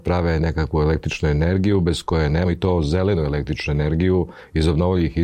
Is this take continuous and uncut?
no; 1 cut; at 2.4 s

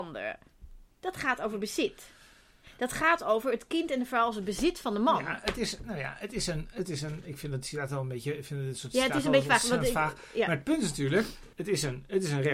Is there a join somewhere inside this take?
yes; 2 cuts; at 0.9 s, 11.5 s

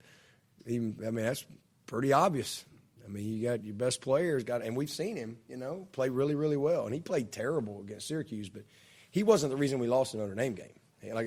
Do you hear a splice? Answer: no; 0 cuts

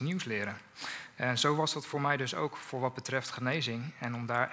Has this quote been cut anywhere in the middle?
no; 0 cuts

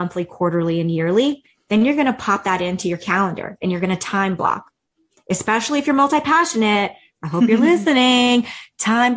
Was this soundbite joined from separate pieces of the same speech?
no; 0 cuts

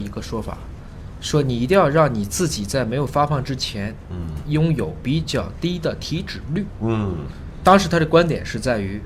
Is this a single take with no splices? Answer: yes; 0 cuts

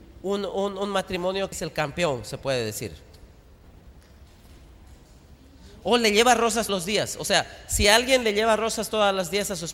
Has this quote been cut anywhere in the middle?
yes; 2 cuts; at 1.5 s, 6.7 s

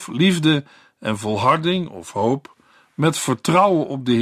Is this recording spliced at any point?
no; 0 cuts

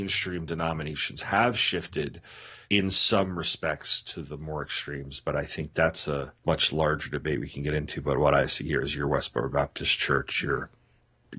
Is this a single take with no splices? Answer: no; 2 cuts; at 2.6 s, 6.4 s

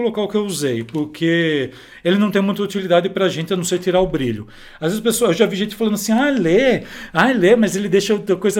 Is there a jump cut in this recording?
no; 0 cuts

